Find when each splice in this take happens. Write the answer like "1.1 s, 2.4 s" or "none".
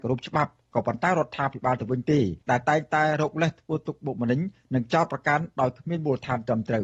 2.4 s